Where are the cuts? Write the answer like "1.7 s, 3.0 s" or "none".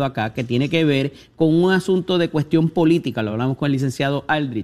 none

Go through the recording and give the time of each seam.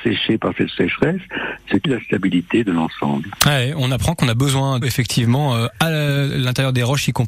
1.8 s, 4.8 s

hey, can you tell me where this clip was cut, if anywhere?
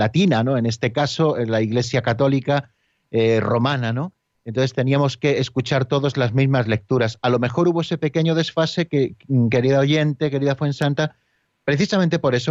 none

